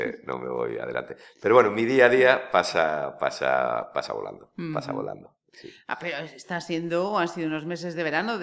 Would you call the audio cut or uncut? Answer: uncut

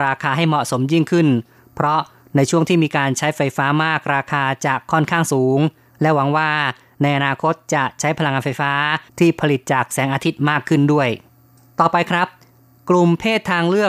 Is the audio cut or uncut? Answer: cut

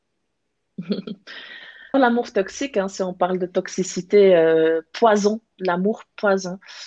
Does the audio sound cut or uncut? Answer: cut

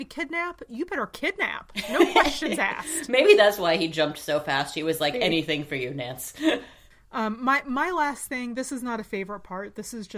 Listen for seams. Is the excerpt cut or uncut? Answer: uncut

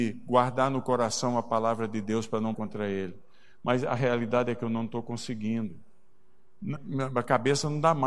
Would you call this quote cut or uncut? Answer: cut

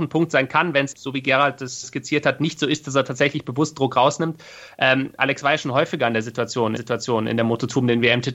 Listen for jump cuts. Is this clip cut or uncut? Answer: cut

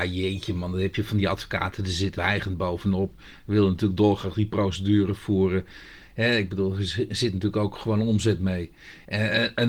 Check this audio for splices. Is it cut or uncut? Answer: cut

